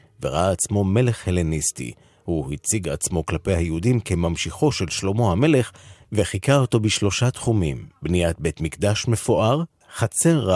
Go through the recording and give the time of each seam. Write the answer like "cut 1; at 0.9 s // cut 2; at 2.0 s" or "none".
none